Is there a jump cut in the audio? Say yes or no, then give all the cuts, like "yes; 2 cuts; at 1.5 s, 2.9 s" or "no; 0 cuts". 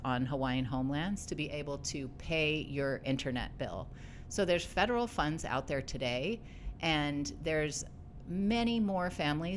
no; 0 cuts